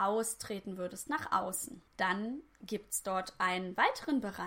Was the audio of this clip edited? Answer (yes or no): yes